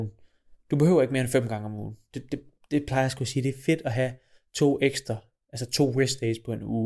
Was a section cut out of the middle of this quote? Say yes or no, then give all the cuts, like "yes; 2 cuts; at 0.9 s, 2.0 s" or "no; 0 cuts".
no; 0 cuts